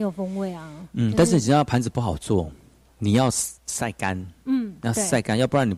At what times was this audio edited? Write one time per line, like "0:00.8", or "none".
0:03.6